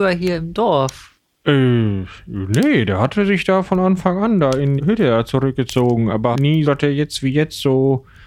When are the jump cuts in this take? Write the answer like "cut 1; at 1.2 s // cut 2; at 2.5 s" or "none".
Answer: cut 1; at 4.8 s // cut 2; at 6.3 s // cut 3; at 6.6 s